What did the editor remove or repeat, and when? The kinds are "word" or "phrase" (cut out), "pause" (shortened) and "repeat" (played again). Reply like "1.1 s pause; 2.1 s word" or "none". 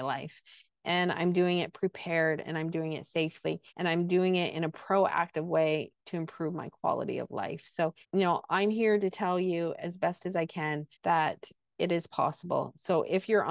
3.7 s pause; 8.0 s pause; 10.9 s pause